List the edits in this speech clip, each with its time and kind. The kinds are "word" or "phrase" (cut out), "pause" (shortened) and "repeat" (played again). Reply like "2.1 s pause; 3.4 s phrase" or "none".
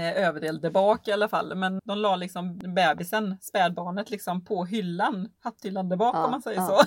1.8 s word